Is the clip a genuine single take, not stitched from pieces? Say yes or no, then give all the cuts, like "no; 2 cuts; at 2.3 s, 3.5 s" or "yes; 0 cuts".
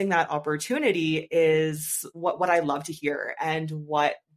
yes; 0 cuts